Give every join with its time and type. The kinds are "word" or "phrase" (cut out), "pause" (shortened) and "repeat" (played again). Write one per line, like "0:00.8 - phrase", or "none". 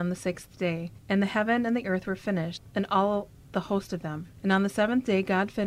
0:01.0 - pause
0:04.4 - pause

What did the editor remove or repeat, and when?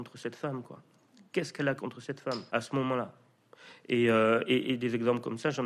0:01.8 - word
0:02.5 - pause

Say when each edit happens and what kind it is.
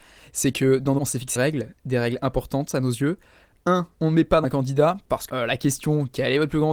0:01.0 - phrase
0:01.4 - word
0:03.9 - pause
0:04.4 - word
0:05.3 - word

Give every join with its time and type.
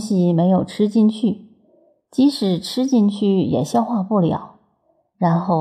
none

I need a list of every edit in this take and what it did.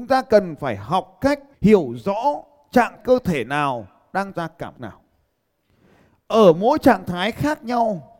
0:01.5 - pause
0:03.0 - word
0:04.3 - word
0:04.7 - word

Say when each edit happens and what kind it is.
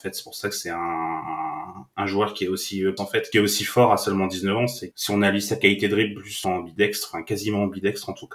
0:03.0 - word
0:03.3 - phrase
0:04.9 - word
0:06.4 - phrase

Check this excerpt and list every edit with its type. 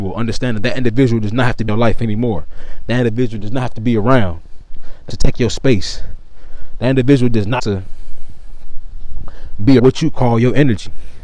0:01.7 - word
0:05.1 - phrase
0:07.6 - word
0:09.8 - word

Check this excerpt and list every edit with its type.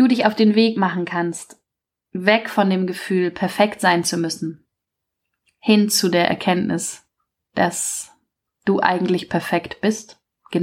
none

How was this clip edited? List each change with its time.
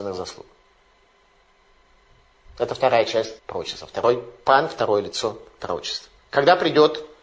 0:03.4 - pause
0:06.2 - pause

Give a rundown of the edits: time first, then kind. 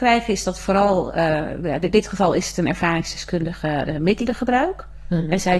none

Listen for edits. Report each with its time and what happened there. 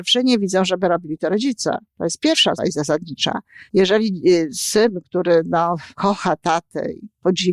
0:02.6 - word
0:03.7 - pause
0:05.9 - pause

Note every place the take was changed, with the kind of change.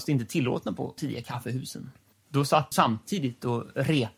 0:01.0 - word
0:02.1 - pause
0:02.7 - word

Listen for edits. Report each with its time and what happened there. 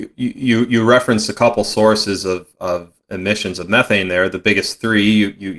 0:02.5 - word
0:03.0 - word

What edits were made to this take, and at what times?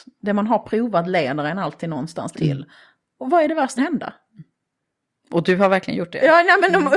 0:02.3 - phrase
0:03.8 - phrase

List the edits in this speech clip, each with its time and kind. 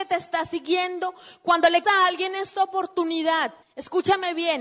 0:01.8 - word
0:03.6 - pause

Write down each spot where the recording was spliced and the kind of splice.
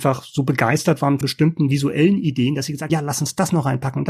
0:01.2 - word
0:02.9 - word

